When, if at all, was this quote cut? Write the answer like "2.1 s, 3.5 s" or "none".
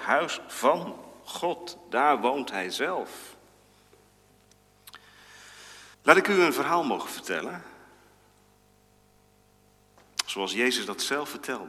5.9 s